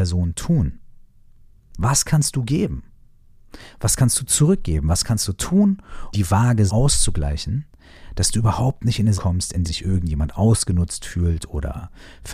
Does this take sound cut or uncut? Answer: cut